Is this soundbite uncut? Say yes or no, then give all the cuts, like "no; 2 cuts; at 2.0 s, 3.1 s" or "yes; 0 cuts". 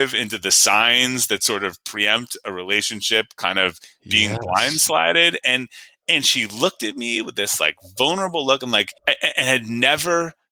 no; 1 cut; at 9.0 s